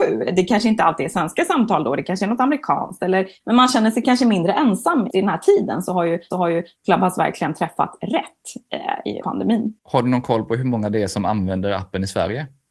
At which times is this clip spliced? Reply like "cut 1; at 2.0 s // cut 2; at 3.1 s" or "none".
cut 1; at 5.1 s // cut 2; at 6.3 s // cut 3; at 9.2 s // cut 4; at 9.8 s